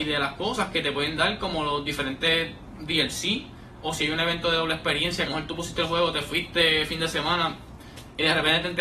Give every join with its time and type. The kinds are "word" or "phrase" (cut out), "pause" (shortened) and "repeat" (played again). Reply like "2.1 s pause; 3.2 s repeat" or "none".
3.8 s word; 5.3 s phrase